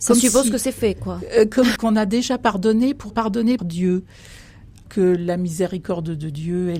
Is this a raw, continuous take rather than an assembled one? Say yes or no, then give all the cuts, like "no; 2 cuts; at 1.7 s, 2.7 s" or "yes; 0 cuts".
no; 4 cuts; at 1.8 s, 3.1 s, 3.6 s, 4.9 s